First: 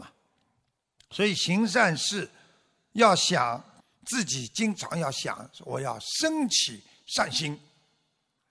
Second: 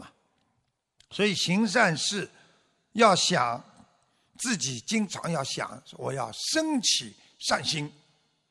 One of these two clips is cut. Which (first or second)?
first